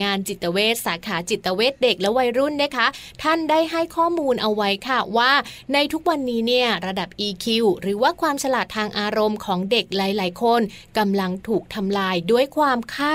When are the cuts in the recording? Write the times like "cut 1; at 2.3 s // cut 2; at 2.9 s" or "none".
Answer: none